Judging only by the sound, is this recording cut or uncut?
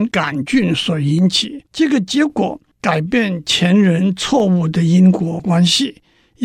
cut